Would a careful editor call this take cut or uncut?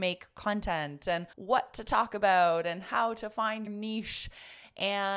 cut